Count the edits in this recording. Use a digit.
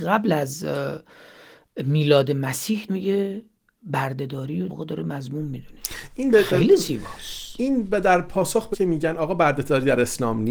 3